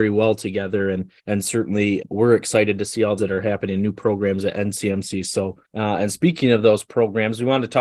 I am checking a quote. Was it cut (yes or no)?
yes